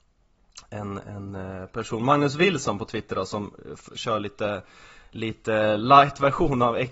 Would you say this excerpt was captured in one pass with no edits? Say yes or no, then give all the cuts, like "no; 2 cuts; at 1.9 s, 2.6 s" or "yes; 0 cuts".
yes; 0 cuts